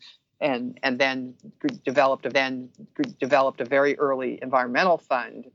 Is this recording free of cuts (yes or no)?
no